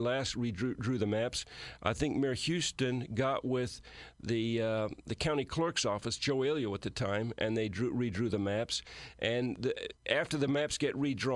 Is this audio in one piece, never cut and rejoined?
yes; 0 cuts

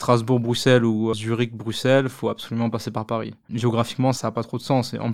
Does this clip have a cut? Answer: yes; 1 cut; at 1.1 s

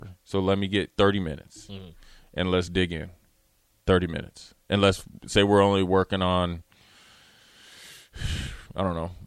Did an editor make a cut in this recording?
no; 0 cuts

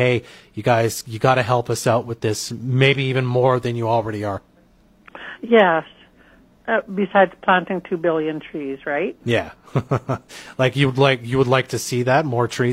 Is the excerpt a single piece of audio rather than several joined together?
yes; 0 cuts

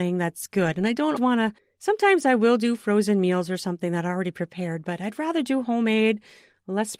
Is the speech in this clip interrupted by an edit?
yes; 2 cuts; at 1.2 s, 1.6 s

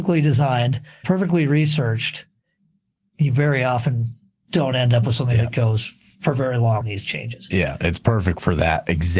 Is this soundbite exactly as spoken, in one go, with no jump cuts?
no; 2 cuts; at 1.0 s, 6.8 s

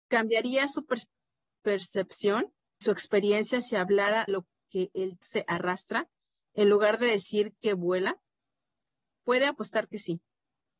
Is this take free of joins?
no; 3 cuts; at 2.8 s, 4.3 s, 5.2 s

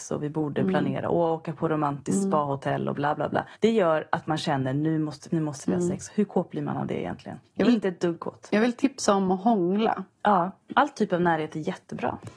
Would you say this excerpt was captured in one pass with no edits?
no; 2 cuts; at 3.5 s, 5.3 s

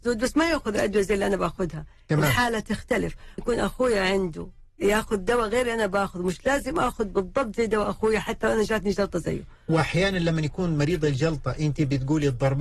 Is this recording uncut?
no; 1 cut; at 3.4 s

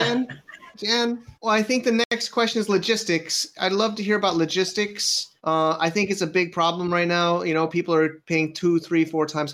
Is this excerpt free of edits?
no; 2 cuts; at 1.3 s, 5.4 s

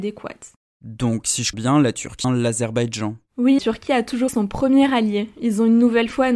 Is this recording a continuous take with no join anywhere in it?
no; 4 cuts; at 1.5 s, 2.2 s, 3.6 s, 4.3 s

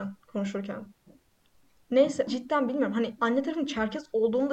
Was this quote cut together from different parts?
yes; 2 cuts; at 2.3 s, 3.2 s

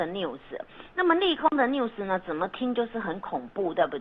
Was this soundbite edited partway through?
no; 0 cuts

